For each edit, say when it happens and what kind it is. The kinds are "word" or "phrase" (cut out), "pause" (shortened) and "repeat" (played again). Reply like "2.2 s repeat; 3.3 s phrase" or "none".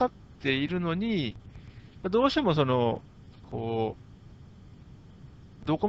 none